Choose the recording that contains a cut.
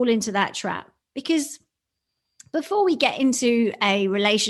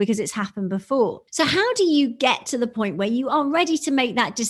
second; 1 cut; at 1.3 s

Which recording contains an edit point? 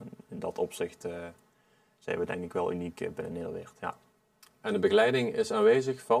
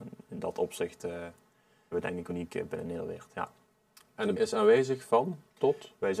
second; 3 cuts; at 1.9 s, 2.3 s, 4.3 s

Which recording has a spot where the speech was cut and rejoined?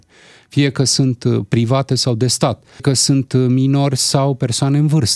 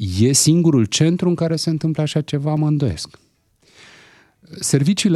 first; 1 cut; at 2.8 s

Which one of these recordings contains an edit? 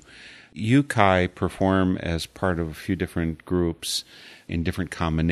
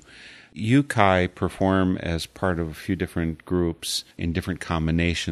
second; 1 cut; at 4.1 s

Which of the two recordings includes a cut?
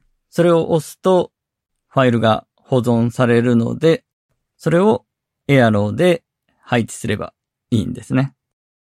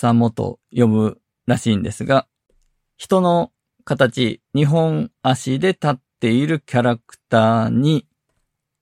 second; 1 cut; at 4.4 s

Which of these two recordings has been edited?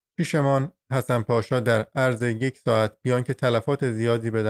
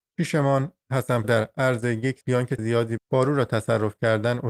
second; 4 cuts; at 1.2 s, 2.2 s, 2.6 s, 3.0 s

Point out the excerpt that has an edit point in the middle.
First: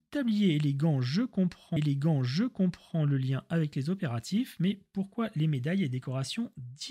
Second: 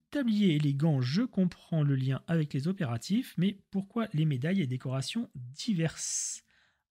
first; 1 cut; at 1.8 s

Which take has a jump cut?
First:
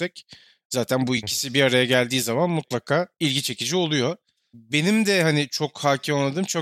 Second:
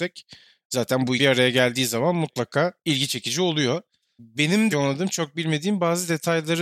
second; 2 cuts; at 1.2 s, 4.7 s

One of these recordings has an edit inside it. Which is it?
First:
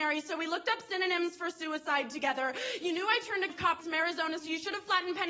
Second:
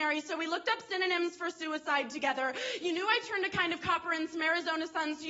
first; 3 cuts; at 3.5 s, 3.8 s, 4.4 s

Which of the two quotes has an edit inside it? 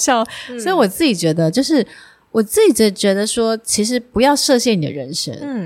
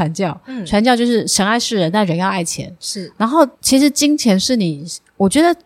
second; 1 cut; at 3.5 s

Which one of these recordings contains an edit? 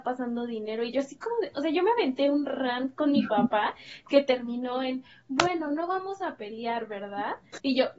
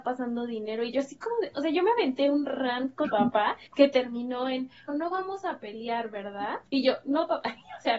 second; 4 cuts; at 3.0 s, 3.7 s, 4.9 s, 6.7 s

